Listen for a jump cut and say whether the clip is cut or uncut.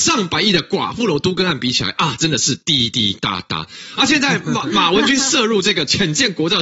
uncut